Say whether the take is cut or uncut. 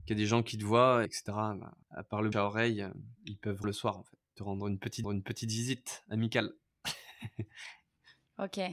cut